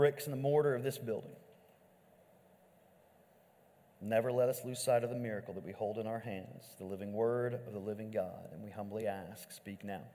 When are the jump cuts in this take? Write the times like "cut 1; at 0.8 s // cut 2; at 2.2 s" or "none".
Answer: none